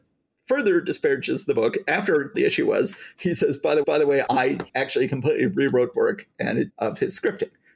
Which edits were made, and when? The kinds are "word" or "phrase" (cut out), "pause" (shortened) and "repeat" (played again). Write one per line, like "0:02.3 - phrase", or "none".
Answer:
0:02.3 - phrase
0:03.8 - repeat
0:05.9 - word
0:06.7 - phrase